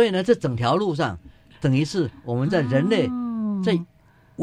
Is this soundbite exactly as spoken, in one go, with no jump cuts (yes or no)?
yes